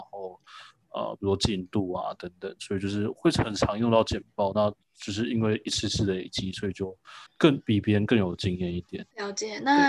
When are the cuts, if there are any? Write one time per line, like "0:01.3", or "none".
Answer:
0:07.3